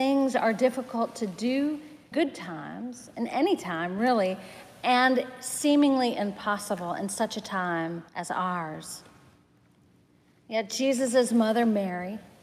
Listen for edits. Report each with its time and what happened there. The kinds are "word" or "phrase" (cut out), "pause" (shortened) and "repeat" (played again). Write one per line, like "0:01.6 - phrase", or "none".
0:02.1 - word
0:08.1 - pause